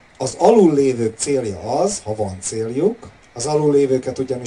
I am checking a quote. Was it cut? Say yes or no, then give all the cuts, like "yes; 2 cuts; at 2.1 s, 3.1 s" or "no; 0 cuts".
yes; 1 cut; at 3.2 s